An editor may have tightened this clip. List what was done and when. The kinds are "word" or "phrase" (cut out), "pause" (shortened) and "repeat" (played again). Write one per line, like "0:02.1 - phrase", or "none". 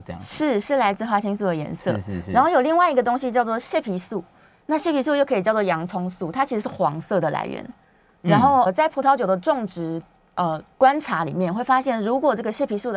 0:08.7 - word